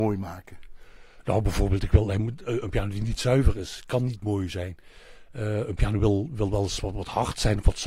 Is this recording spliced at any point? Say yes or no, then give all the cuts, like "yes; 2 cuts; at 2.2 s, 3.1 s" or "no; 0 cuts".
no; 0 cuts